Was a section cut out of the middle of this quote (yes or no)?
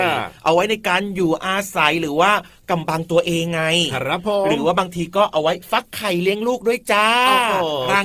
no